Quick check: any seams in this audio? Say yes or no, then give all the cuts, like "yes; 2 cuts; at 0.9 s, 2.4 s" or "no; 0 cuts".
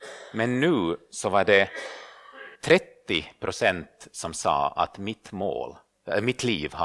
yes; 1 cut; at 2.6 s